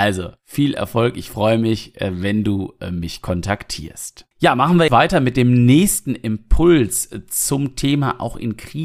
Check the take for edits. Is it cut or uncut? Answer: cut